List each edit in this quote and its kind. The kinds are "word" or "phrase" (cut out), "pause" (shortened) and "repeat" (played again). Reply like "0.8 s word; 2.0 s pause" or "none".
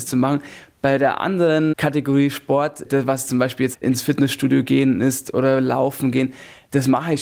3.7 s word

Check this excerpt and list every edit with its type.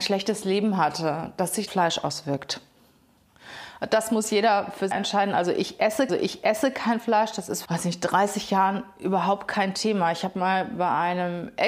1.7 s phrase; 4.9 s phrase; 6.1 s repeat; 7.6 s phrase

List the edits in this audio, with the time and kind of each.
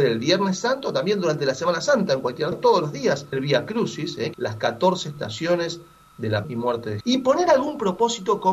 2.5 s word; 3.3 s word; 4.3 s word; 6.4 s word; 7.0 s word

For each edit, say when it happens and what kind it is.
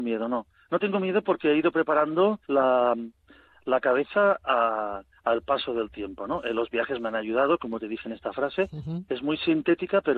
2.4 s pause

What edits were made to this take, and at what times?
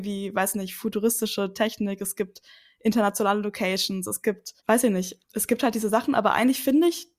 4.6 s pause; 5.2 s word

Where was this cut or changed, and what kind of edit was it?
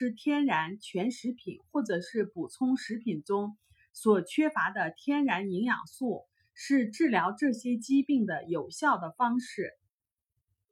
none

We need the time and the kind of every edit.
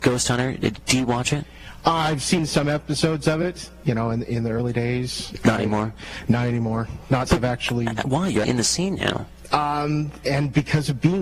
3.8 s word; 7.3 s word; 8.4 s word

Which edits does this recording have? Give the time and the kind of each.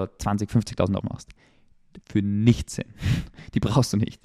1.0 s word; 2.0 s pause

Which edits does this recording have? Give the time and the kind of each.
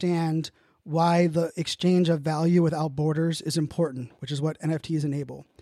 none

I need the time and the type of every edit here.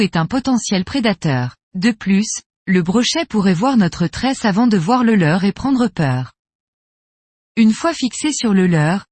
1.6 s pause

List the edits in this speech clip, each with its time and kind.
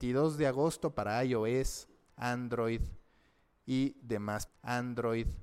4.5 s repeat

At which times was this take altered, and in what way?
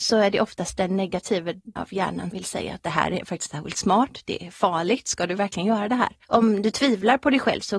1.8 s word; 2.3 s word; 3.5 s word; 6.2 s pause

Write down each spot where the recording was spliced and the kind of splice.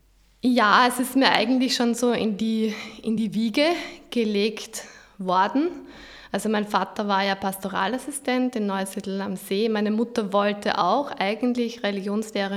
none

